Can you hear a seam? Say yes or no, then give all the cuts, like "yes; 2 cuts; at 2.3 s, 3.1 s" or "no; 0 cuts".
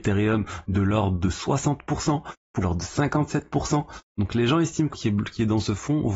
yes; 2 cuts; at 2.6 s, 4.9 s